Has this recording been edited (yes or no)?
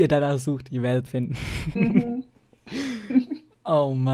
yes